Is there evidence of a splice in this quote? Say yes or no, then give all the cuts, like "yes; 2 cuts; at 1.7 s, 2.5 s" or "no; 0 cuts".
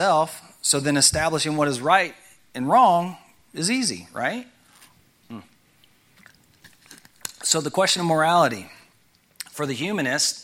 no; 0 cuts